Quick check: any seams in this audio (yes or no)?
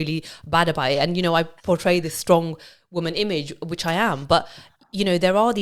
no